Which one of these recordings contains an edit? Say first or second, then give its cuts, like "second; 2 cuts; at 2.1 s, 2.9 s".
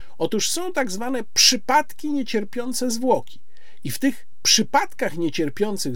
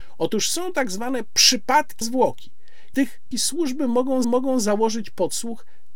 second; 4 cuts; at 2.0 s, 2.9 s, 3.3 s, 4.2 s